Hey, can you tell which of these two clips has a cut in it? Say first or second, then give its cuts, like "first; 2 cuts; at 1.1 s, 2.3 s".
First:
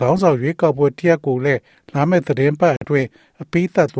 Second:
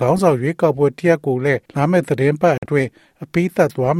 second; 1 cut; at 1.6 s